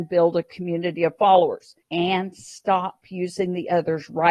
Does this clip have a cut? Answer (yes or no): yes